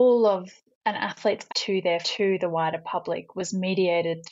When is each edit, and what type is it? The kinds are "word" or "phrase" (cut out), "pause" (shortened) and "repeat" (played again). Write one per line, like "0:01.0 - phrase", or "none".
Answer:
0:01.5 - word
0:02.0 - word